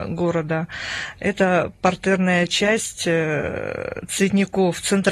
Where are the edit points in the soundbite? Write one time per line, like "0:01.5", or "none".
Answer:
none